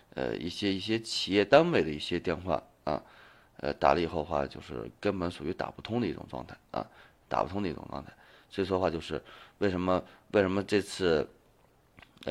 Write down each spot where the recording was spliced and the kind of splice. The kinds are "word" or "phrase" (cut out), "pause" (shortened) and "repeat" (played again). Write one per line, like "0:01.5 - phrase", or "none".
none